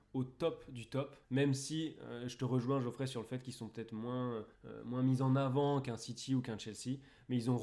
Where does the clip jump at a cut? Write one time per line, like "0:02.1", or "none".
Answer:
0:01.2
0:04.5